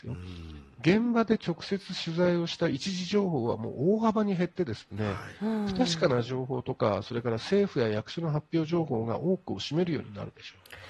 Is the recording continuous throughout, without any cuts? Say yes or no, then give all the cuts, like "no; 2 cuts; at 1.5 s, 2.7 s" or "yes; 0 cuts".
yes; 0 cuts